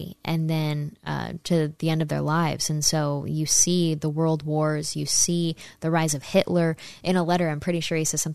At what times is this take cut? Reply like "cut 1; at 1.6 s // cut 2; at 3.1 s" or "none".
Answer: none

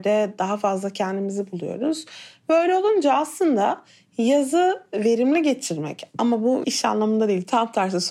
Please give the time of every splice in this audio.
cut 1; at 6.6 s

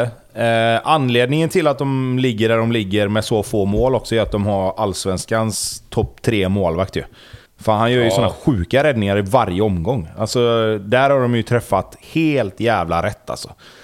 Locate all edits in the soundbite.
cut 1; at 7.5 s // cut 2; at 12.0 s

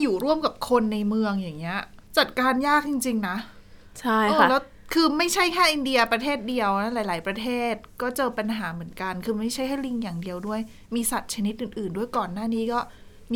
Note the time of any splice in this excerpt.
cut 1; at 2.1 s

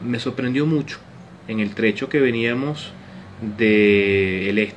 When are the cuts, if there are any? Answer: none

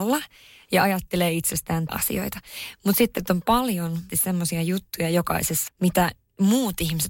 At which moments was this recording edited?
cut 1; at 1.9 s // cut 2; at 3.2 s // cut 3; at 4.1 s // cut 4; at 5.7 s

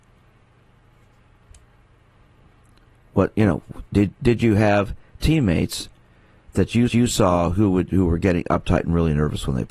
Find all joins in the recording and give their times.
cut 1; at 6.9 s

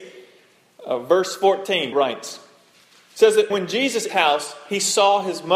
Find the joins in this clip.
cut 1; at 1.9 s // cut 2; at 2.8 s // cut 3; at 3.5 s // cut 4; at 4.1 s

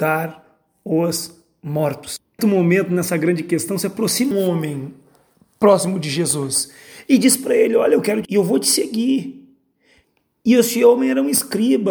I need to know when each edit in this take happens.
cut 1; at 2.4 s // cut 2; at 4.3 s // cut 3; at 8.2 s

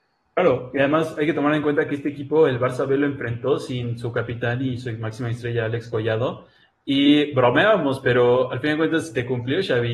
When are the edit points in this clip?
none

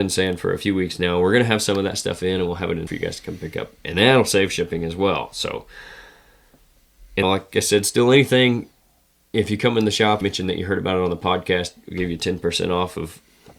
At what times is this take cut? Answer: cut 1; at 2.9 s // cut 2; at 7.2 s // cut 3; at 10.2 s

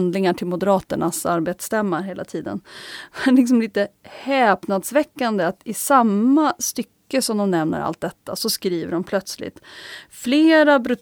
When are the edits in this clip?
none

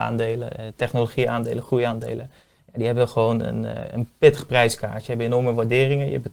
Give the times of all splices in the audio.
none

